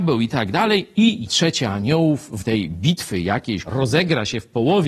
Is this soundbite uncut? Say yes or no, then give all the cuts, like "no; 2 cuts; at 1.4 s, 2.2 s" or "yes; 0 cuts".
no; 3 cuts; at 1.3 s, 2.4 s, 3.6 s